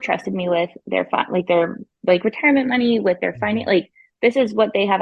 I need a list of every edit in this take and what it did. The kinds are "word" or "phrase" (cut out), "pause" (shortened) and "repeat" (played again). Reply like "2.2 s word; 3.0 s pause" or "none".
none